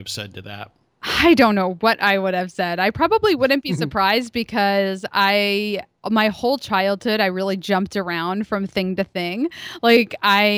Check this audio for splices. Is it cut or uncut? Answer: uncut